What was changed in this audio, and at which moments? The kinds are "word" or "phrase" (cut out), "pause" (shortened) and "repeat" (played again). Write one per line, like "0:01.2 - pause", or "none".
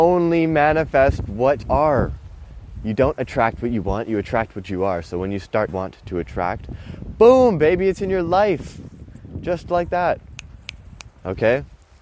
0:01.6 - word
0:05.7 - phrase